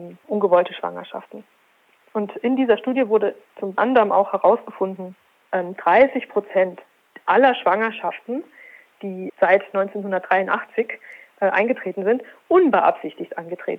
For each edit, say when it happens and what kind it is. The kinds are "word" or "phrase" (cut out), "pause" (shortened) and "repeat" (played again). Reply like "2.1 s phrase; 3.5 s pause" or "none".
3.8 s word; 5.5 s word; 9.3 s word

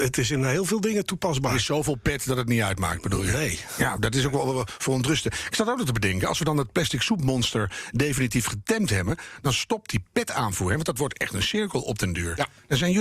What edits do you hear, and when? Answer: none

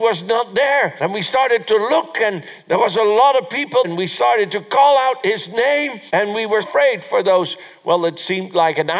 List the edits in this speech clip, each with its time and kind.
3.8 s word; 6.6 s word

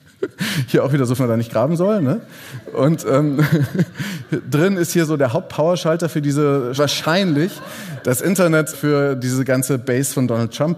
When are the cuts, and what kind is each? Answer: 1.2 s phrase; 6.8 s phrase; 8.7 s word

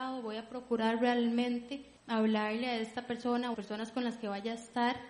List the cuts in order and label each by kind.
2.0 s pause; 3.5 s phrase

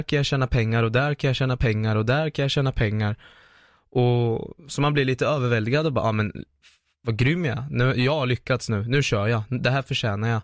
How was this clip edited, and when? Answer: 4.6 s pause

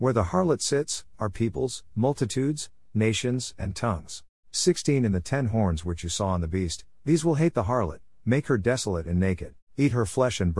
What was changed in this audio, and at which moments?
4.4 s pause; 9.6 s pause

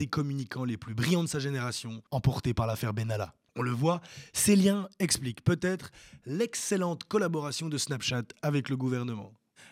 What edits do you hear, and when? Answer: 2.1 s pause

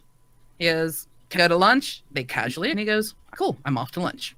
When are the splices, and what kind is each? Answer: 1.4 s word; 2.1 s pause; 2.7 s phrase; 3.3 s word

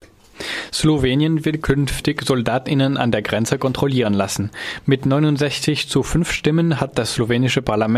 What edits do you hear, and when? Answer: none

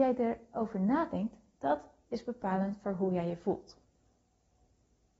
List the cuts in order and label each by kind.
none

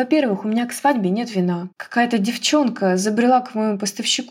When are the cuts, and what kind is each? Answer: 1.7 s pause

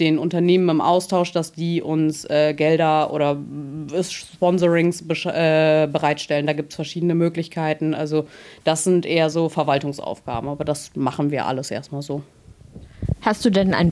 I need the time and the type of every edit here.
none

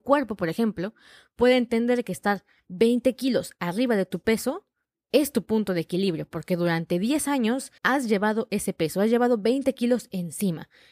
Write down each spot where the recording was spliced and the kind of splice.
7.8 s pause

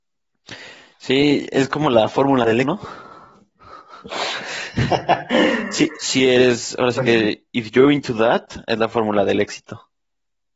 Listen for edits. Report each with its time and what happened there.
2.6 s word

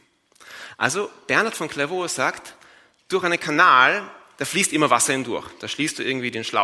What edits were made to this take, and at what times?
none

